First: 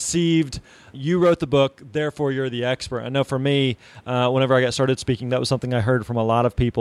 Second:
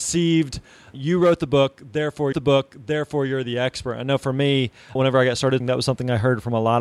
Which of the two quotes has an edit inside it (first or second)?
second